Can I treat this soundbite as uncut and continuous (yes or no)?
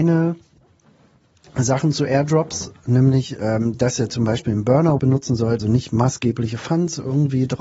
no